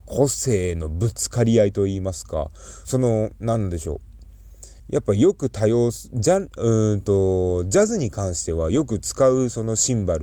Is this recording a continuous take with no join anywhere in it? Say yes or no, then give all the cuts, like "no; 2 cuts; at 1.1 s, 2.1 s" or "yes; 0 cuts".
no; 2 cuts; at 2.8 s, 4.8 s